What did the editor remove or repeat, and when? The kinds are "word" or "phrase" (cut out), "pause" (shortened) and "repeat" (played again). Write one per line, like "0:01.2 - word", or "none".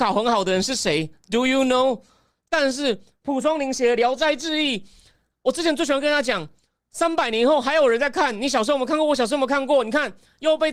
none